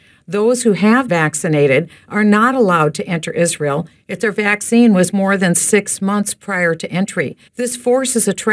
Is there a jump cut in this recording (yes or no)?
yes